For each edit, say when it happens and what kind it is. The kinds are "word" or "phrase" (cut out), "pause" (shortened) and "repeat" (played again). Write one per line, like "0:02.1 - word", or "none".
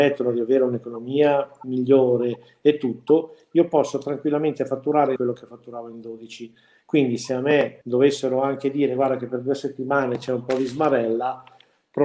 0:05.2 - phrase
0:07.8 - pause